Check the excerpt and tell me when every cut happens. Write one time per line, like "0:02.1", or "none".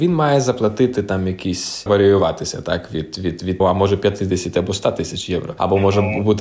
0:01.9
0:03.6

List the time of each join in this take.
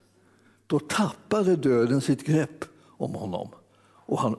none

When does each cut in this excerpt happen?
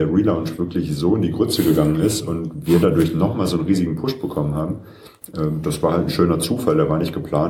none

